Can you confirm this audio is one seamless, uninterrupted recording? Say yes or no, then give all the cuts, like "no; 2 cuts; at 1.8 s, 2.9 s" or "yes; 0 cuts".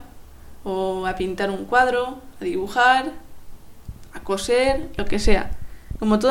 yes; 0 cuts